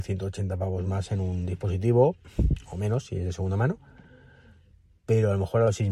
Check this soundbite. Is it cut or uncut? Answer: uncut